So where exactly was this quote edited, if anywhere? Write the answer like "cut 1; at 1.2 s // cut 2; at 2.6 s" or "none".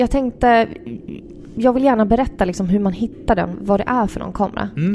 none